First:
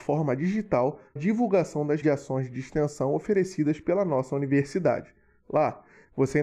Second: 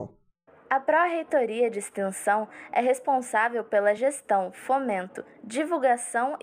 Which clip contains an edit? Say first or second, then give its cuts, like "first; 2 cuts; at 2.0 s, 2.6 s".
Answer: first; 2 cuts; at 1.2 s, 2.0 s